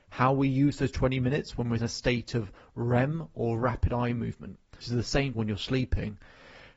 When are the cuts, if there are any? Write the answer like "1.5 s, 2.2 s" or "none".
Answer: 1.8 s, 4.8 s, 5.3 s